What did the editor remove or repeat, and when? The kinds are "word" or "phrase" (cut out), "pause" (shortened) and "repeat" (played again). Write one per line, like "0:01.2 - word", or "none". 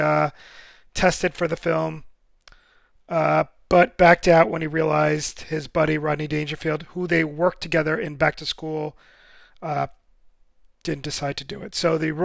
none